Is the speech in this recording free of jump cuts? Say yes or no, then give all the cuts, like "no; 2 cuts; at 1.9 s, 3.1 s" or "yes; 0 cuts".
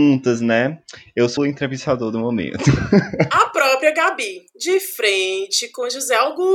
no; 1 cut; at 1.4 s